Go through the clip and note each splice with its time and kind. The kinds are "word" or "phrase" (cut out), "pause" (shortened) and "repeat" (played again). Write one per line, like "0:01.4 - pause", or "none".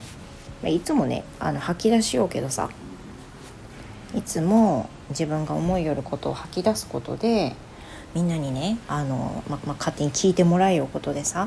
0:09.6 - repeat